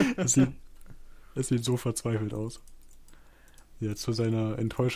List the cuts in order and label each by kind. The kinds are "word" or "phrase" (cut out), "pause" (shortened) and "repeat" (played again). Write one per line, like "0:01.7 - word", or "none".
0:03.7 - pause